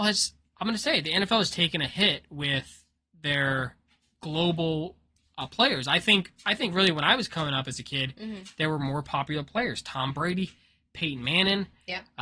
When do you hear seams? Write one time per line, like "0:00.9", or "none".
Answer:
none